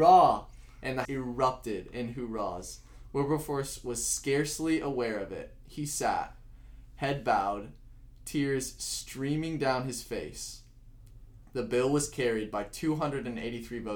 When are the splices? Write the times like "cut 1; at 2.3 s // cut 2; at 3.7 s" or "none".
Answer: cut 1; at 1.0 s